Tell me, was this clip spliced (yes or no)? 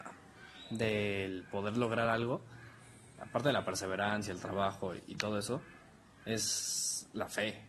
no